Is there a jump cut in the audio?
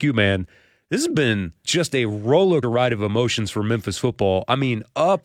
yes; 2 cuts; at 1.6 s, 2.6 s

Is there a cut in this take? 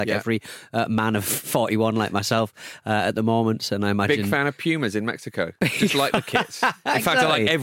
no; 0 cuts

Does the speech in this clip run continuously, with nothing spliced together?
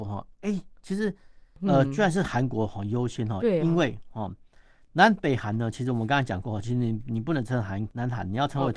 yes; 0 cuts

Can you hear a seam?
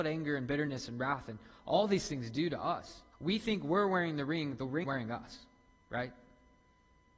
yes; 3 cuts; at 3.1 s, 4.8 s, 5.8 s

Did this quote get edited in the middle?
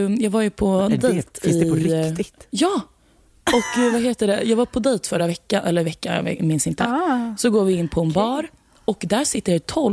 no; 0 cuts

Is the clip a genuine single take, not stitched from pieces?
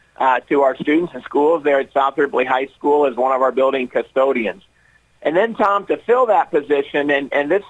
yes; 0 cuts

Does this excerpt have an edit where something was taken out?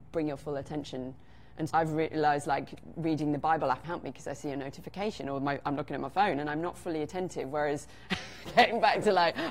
yes; 2 cuts; at 1.7 s, 3.8 s

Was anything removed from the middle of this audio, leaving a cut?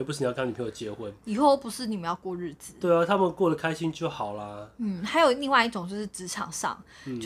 no; 0 cuts

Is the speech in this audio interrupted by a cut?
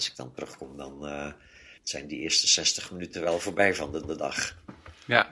yes; 2 cuts; at 1.8 s, 4.0 s

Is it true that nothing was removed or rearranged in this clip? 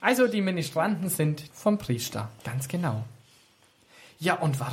no; 2 cuts; at 1.5 s, 2.4 s

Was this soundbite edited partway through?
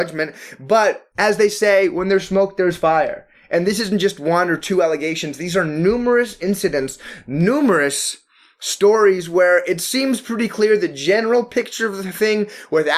no; 0 cuts

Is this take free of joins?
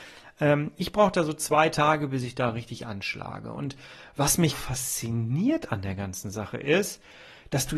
no; 1 cut; at 4.5 s

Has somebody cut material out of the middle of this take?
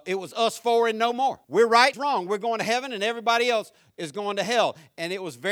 yes; 2 cuts; at 1.4 s, 1.9 s

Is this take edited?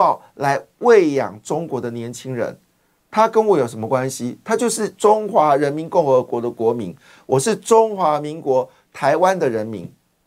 no; 0 cuts

